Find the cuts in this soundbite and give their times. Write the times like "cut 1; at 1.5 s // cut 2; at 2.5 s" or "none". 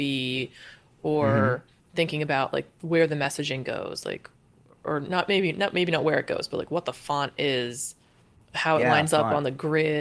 none